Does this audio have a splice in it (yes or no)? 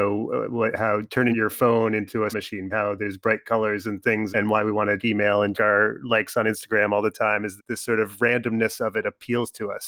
yes